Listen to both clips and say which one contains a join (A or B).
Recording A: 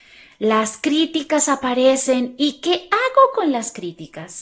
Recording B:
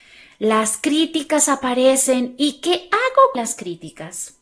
B